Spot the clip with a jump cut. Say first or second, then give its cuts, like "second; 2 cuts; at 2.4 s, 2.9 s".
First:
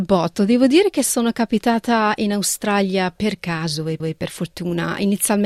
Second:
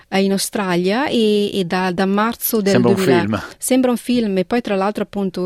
first; 1 cut; at 4.0 s